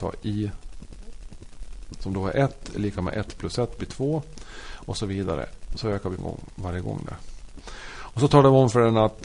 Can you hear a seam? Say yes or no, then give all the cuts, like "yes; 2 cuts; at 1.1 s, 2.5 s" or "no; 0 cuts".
yes; 1 cut; at 6.2 s